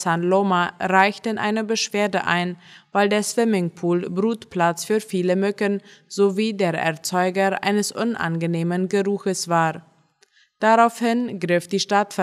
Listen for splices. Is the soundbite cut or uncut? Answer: uncut